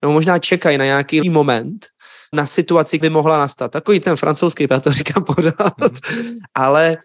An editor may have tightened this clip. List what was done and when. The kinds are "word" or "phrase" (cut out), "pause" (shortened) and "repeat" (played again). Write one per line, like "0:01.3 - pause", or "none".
0:01.2 - word
0:02.3 - word
0:03.0 - word
0:04.0 - word
0:04.7 - word